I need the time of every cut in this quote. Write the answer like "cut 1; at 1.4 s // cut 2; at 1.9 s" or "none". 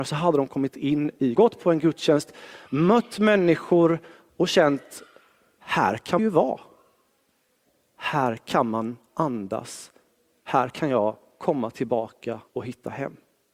cut 1; at 1.4 s // cut 2; at 6.2 s